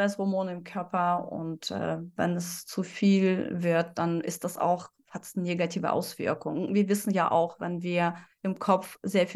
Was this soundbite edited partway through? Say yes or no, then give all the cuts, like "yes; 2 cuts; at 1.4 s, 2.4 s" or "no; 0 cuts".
no; 0 cuts